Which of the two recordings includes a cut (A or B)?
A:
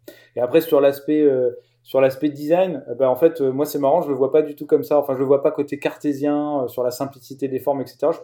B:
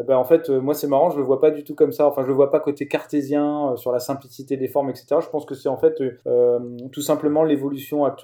B